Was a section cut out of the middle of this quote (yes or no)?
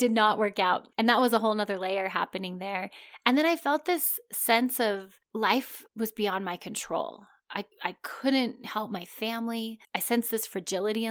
yes